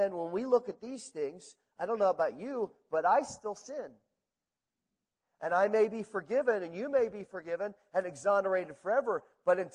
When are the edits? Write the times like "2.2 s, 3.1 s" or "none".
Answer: none